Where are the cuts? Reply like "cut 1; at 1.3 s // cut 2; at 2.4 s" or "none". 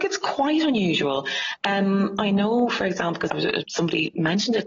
cut 1; at 3.3 s // cut 2; at 3.6 s